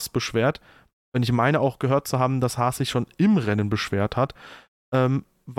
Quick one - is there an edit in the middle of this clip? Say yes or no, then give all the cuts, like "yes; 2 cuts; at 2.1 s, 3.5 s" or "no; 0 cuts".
no; 0 cuts